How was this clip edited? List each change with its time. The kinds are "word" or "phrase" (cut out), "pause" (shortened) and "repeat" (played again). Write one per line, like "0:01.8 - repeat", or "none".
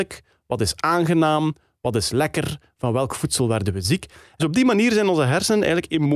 0:04.4 - word